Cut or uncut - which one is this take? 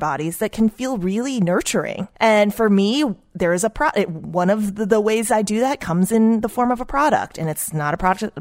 cut